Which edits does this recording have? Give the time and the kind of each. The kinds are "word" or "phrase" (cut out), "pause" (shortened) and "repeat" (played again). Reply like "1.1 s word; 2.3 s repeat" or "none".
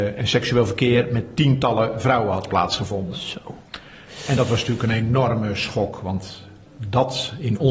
none